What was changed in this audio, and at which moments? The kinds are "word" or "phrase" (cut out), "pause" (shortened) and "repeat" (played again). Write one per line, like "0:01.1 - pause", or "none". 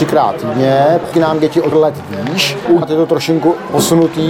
0:01.1 - word
0:01.7 - word
0:02.8 - word